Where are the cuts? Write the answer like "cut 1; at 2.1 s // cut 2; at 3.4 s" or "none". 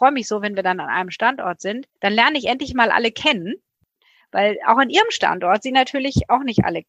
cut 1; at 2.0 s